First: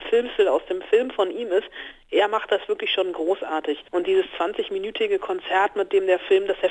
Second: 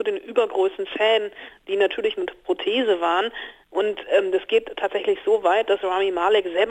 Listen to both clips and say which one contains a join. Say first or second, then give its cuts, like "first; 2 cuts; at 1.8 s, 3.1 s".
first; 1 cut; at 3.9 s